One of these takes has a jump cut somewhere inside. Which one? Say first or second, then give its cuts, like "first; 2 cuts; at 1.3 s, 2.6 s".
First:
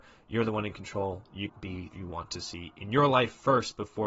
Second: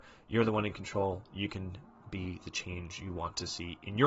first; 2 cuts; at 1.5 s, 1.9 s